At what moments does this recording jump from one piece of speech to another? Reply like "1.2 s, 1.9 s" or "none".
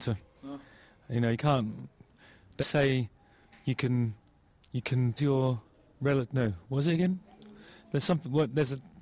2.6 s, 5.2 s